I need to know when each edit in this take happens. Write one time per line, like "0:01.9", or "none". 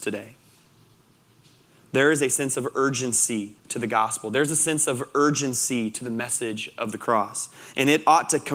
0:03.6

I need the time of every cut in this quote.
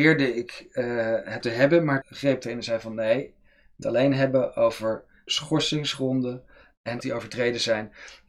0:01.4
0:02.0
0:02.4
0:03.8
0:05.3
0:07.0

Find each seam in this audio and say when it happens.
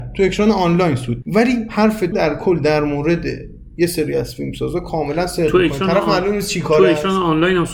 0:01.2
0:02.1

